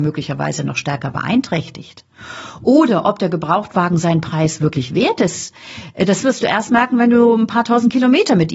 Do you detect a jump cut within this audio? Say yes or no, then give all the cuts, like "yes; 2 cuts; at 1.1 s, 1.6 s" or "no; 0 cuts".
no; 0 cuts